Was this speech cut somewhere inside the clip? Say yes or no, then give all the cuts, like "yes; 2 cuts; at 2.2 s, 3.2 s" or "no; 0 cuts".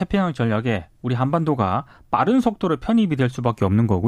no; 0 cuts